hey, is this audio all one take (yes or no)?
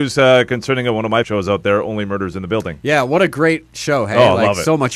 no